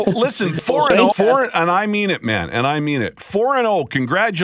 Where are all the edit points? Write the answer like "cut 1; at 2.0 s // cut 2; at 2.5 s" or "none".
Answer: cut 1; at 1.1 s